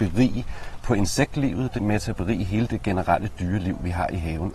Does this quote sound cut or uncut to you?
cut